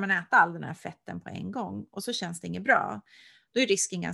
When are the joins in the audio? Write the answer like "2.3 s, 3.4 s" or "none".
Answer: none